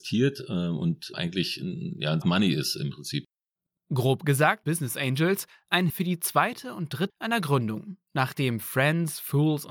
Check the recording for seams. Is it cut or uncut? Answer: cut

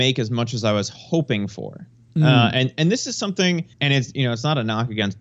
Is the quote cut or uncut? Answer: cut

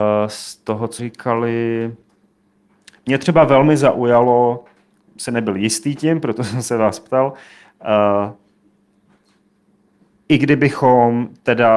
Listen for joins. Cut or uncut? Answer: cut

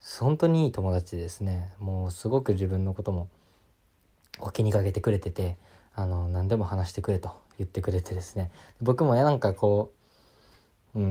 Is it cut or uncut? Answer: uncut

